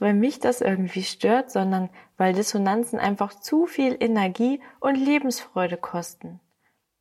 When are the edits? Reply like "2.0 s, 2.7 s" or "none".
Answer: none

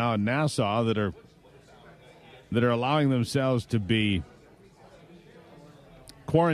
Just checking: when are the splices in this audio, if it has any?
none

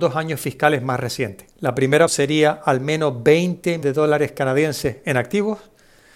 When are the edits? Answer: 1.5 s, 2.1 s, 3.8 s

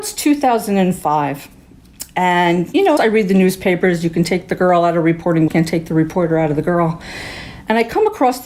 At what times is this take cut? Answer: 3.0 s, 5.5 s

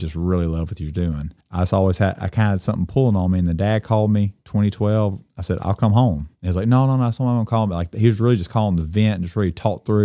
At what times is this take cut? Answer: 4.4 s, 6.3 s

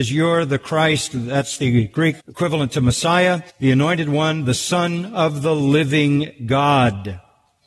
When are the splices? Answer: 2.2 s, 3.5 s

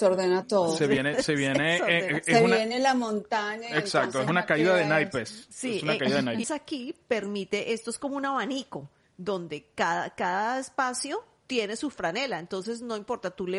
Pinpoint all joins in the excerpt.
6.4 s

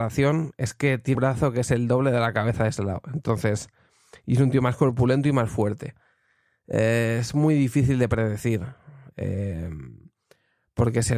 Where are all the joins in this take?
1.1 s

